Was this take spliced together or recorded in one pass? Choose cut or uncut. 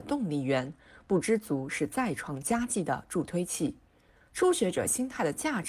uncut